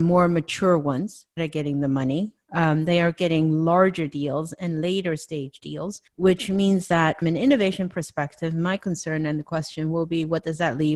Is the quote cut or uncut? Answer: cut